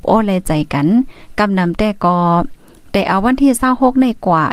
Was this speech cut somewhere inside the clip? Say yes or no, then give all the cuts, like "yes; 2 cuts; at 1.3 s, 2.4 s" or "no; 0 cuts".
no; 0 cuts